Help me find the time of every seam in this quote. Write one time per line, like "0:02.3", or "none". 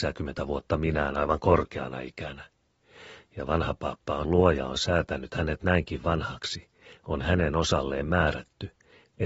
0:04.2